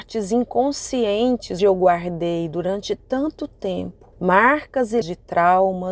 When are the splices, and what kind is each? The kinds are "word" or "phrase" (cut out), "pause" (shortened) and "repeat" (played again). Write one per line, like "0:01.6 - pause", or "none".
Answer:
0:01.6 - word
0:04.1 - pause
0:05.0 - word